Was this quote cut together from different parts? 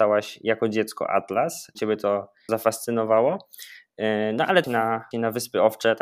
yes; 4 cuts; at 1.7 s, 2.5 s, 4.6 s, 5.1 s

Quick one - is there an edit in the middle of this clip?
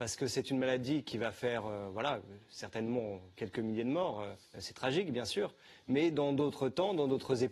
yes; 1 cut; at 4.5 s

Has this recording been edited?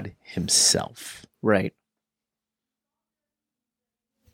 yes; 1 cut; at 1.3 s

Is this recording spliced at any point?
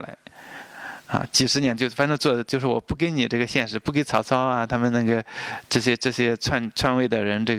no; 0 cuts

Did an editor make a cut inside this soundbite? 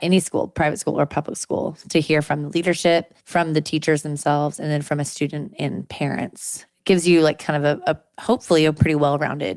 yes; 1 cut; at 3.2 s

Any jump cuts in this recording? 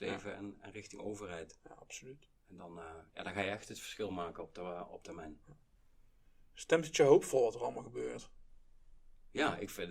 yes; 1 cut; at 2.4 s

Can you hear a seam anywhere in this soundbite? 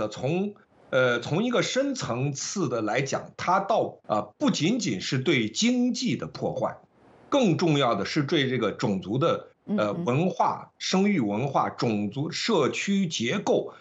yes; 1 cut; at 4.0 s

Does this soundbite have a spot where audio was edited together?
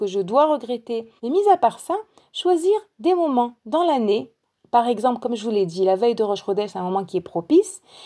yes; 1 cut; at 1.2 s

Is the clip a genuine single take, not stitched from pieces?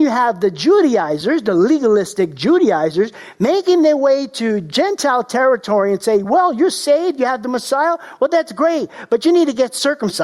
yes; 0 cuts

